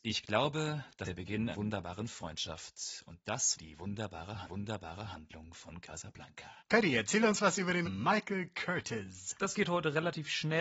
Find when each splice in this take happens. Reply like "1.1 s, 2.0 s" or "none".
1.0 s, 1.5 s, 3.5 s, 4.4 s, 6.6 s, 7.8 s